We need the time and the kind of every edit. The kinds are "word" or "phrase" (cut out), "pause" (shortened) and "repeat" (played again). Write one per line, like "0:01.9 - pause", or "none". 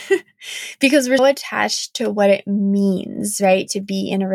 0:01.2 - word